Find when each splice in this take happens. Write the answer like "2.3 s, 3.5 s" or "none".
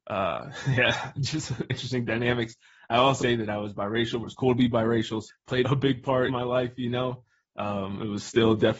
1.7 s, 3.2 s, 4.2 s, 5.3 s, 5.6 s, 6.3 s